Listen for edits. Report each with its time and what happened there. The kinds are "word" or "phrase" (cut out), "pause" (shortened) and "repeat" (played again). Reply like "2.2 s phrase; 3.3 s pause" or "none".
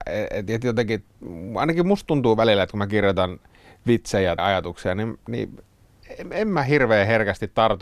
4.4 s word